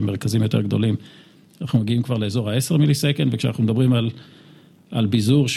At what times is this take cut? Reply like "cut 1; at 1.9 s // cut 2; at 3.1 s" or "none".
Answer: none